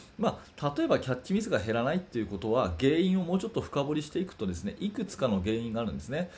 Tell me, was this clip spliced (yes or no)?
no